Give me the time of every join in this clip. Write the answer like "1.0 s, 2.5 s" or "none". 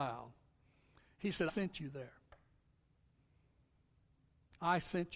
1.5 s